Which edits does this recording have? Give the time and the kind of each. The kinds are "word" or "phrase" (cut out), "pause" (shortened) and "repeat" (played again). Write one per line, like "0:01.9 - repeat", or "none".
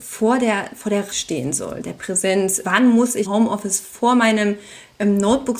0:01.1 - phrase
0:02.6 - word
0:03.2 - word